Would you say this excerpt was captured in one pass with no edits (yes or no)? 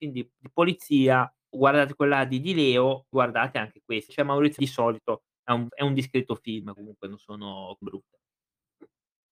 no